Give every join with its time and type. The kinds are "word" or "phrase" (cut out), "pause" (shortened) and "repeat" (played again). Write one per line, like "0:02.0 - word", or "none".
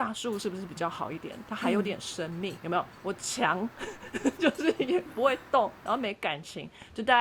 0:02.6 - word